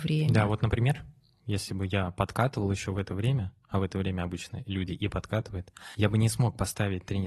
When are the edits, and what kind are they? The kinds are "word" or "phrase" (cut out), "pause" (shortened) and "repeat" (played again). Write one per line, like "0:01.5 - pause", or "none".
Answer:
none